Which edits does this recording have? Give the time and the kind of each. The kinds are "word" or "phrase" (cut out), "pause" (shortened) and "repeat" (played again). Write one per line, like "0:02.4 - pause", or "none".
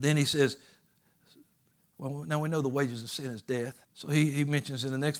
0:03.8 - pause